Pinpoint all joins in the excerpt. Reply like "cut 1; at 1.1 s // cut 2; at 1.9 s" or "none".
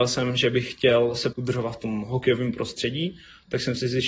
cut 1; at 1.3 s